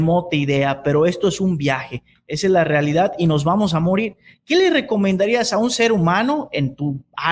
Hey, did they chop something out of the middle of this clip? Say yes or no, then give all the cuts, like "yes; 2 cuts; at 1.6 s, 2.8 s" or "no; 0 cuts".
no; 0 cuts